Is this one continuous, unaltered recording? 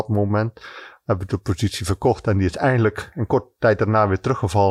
yes; 0 cuts

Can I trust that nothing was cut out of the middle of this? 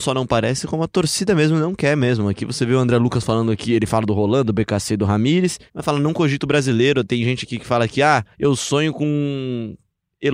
no; 2 cuts; at 5.7 s, 8.3 s

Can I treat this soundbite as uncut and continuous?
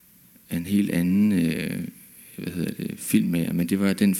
yes; 0 cuts

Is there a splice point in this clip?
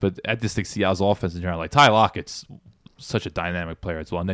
no; 0 cuts

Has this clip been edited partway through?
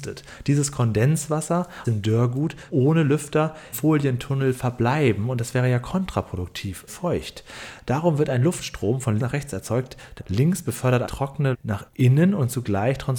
yes; 9 cuts; at 1.8 s, 2.7 s, 3.7 s, 6.9 s, 9.2 s, 10.2 s, 11.0 s, 11.5 s, 11.9 s

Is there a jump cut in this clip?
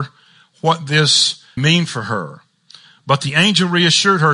yes; 1 cut; at 1.6 s

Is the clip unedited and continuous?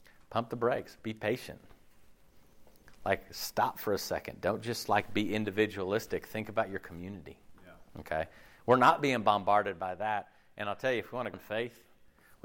no; 2 cuts; at 7.9 s, 11.3 s

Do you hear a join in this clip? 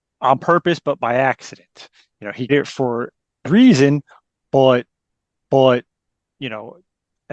yes; 3 cuts; at 2.5 s, 3.4 s, 5.3 s

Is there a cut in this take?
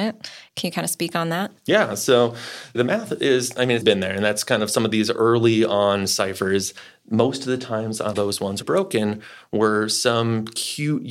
yes; 4 cuts; at 2.7 s, 3.8 s, 8.1 s, 8.6 s

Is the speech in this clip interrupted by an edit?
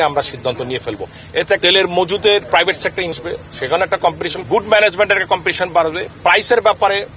yes; 4 cuts; at 1.6 s, 2.5 s, 3.1 s, 4.4 s

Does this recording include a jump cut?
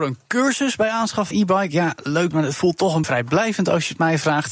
yes; 3 cuts; at 1.3 s, 2.3 s, 3.0 s

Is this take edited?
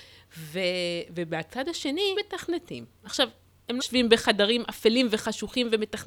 yes; 2 cuts; at 2.1 s, 3.8 s

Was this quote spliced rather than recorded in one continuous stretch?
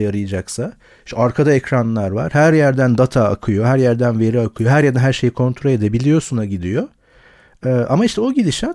no; 0 cuts

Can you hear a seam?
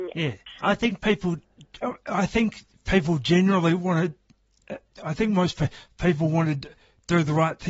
no; 0 cuts

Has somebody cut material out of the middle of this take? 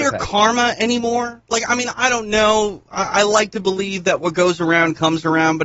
yes; 1 cut; at 1.9 s

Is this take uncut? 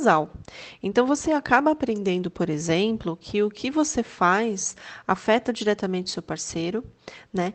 yes; 0 cuts

